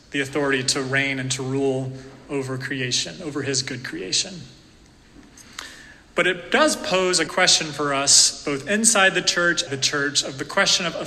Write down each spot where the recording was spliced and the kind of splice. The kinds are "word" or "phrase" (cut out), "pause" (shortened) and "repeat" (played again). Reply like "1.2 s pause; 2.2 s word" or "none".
7.3 s word; 9.7 s phrase